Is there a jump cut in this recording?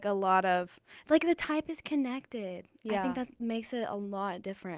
no; 0 cuts

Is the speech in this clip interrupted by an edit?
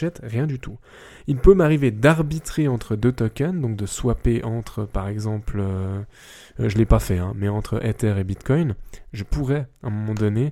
no; 0 cuts

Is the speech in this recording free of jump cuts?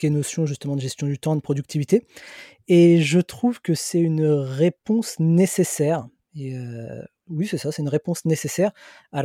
yes; 0 cuts

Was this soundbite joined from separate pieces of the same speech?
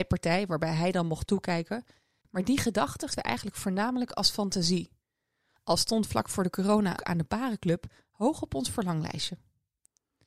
yes; 2 cuts; at 3.1 s, 7.0 s

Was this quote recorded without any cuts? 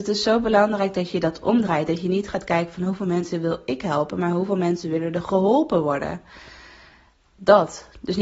yes; 0 cuts

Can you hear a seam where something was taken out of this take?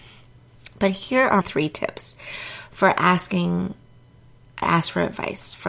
yes; 2 cuts; at 1.4 s, 4.6 s

